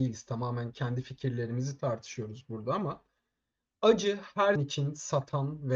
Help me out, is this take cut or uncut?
cut